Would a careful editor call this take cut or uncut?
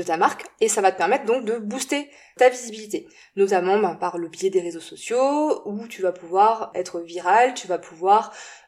uncut